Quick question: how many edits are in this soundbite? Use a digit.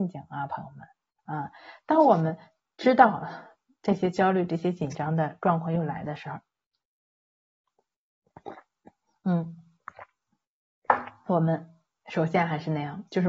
0